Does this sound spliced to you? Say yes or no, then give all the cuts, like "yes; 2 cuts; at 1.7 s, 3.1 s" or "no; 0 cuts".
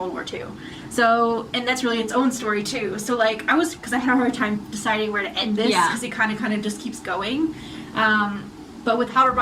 no; 0 cuts